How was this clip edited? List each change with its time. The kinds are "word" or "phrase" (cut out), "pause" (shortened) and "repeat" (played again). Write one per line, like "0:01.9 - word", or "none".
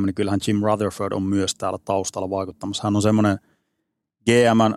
none